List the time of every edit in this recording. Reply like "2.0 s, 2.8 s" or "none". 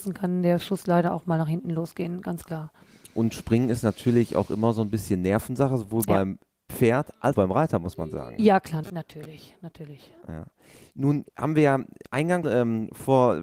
7.3 s, 8.8 s, 11.3 s, 12.4 s